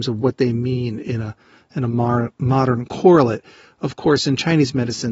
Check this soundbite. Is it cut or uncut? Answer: uncut